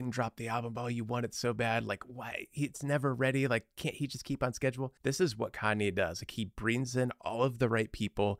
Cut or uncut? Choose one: cut